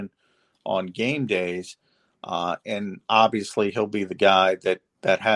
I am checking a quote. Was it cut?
no; 0 cuts

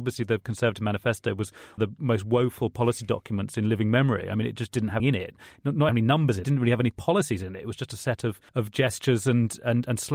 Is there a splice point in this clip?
yes; 5 cuts; at 1.8 s, 5.0 s, 5.9 s, 6.4 s, 8.5 s

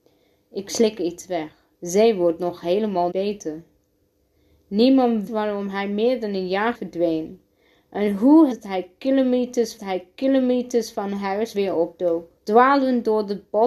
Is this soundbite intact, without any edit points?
no; 8 cuts; at 1.7 s, 3.1 s, 5.3 s, 6.7 s, 8.5 s, 9.8 s, 11.5 s, 12.4 s

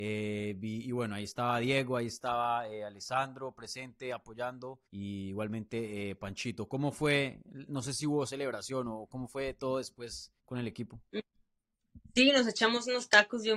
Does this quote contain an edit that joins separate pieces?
yes; 2 cuts; at 4.9 s, 10.4 s

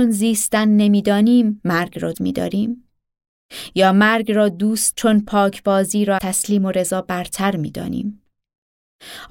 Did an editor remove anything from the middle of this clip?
yes; 3 cuts; at 2.1 s, 4.9 s, 6.2 s

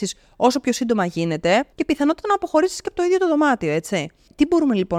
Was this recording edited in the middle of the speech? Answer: yes; 1 cut; at 1.7 s

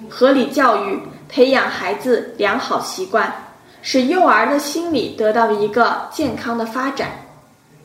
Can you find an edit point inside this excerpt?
no; 0 cuts

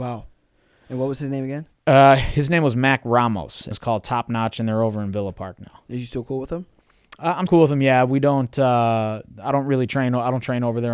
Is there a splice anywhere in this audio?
yes; 2 cuts; at 3.7 s, 7.5 s

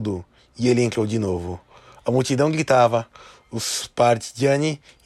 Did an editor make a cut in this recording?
no; 0 cuts

